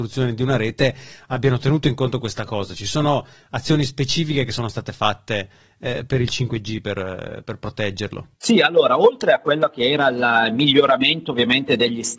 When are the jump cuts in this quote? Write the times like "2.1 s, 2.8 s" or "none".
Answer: 8.3 s